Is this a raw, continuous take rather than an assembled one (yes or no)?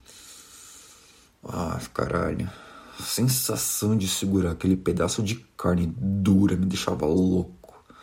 yes